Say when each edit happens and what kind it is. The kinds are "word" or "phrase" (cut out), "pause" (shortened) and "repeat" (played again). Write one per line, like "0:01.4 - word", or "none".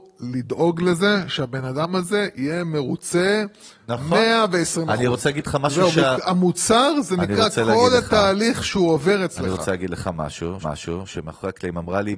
0:10.6 - repeat